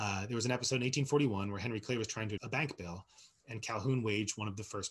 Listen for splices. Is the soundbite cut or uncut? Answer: cut